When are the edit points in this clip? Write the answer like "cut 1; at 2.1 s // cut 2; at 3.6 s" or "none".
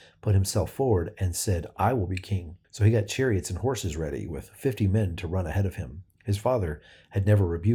cut 1; at 2.6 s